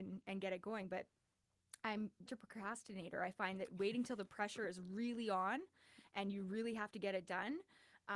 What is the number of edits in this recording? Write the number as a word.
one